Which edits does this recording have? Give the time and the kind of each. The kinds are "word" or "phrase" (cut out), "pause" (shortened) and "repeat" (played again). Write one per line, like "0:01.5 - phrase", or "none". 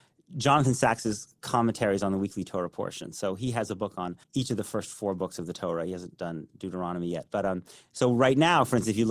0:04.2 - pause

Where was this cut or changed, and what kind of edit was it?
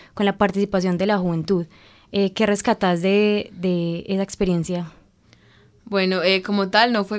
none

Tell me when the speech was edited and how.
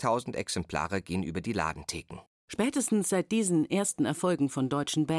0:02.3 - pause

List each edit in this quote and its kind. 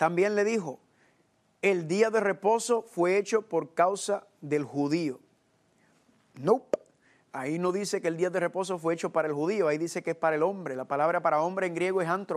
none

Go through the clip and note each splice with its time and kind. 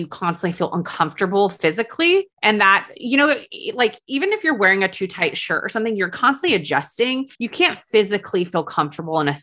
0:02.3 - pause
0:07.3 - pause

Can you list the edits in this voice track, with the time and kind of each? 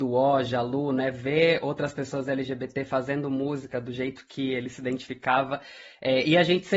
none

